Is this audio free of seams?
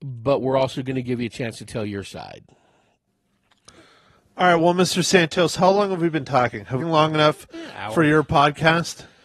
no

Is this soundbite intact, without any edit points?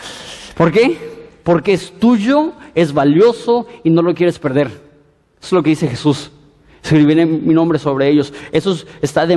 yes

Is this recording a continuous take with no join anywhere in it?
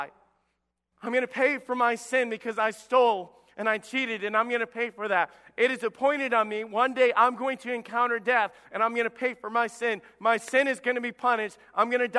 yes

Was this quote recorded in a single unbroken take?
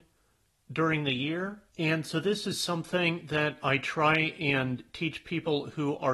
no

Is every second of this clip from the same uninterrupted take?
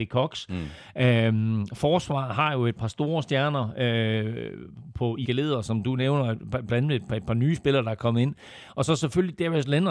no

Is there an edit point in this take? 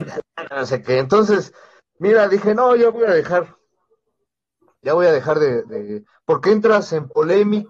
no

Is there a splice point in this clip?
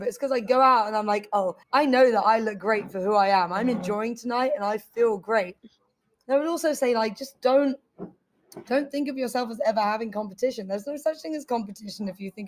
yes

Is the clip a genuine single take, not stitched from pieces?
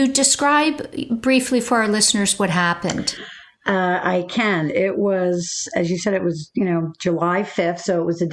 yes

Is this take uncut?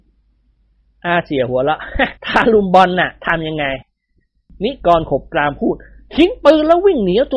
no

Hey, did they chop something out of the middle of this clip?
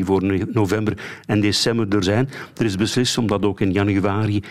yes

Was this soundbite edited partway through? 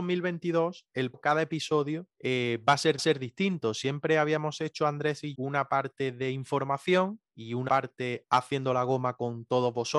yes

